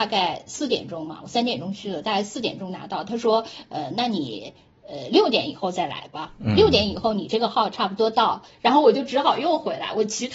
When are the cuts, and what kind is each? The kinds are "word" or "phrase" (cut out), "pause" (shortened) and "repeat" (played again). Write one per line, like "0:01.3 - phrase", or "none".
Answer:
none